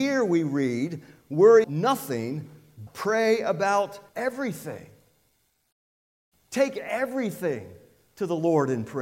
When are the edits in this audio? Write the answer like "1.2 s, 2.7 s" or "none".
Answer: 1.6 s, 2.9 s, 4.1 s